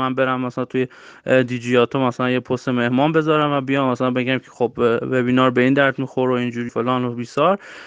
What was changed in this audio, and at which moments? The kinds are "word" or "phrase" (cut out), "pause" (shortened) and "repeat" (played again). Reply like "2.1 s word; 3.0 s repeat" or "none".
6.7 s word